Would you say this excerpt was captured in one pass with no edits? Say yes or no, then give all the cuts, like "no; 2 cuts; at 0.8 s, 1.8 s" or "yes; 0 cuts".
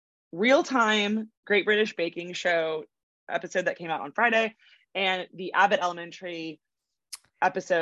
no; 1 cut; at 1.4 s